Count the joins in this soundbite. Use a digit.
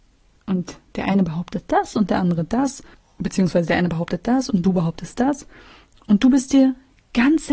0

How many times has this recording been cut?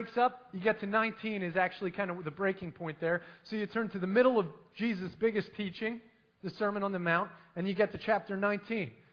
0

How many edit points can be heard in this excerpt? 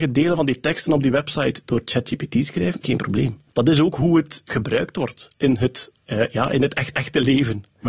4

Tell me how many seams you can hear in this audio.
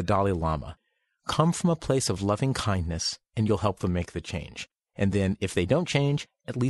0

